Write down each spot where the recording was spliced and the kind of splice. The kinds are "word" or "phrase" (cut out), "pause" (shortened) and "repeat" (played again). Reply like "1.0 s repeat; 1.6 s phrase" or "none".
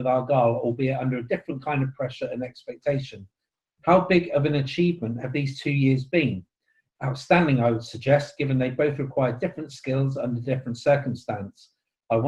none